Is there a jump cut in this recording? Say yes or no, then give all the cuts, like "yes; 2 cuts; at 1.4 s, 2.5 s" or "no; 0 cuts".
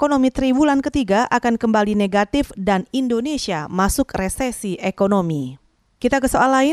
no; 0 cuts